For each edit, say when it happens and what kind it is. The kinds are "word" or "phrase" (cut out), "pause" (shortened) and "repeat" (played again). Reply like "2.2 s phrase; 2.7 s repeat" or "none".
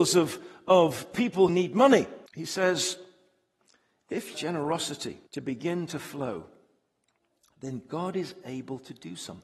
1.5 s word; 2.3 s pause; 4.3 s phrase; 5.3 s pause